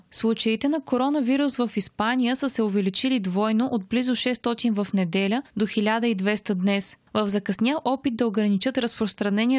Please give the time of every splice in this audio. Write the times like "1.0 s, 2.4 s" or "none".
none